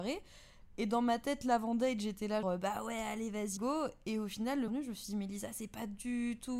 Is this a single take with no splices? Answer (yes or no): no